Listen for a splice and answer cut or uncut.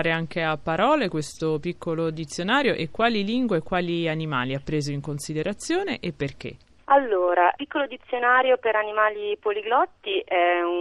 uncut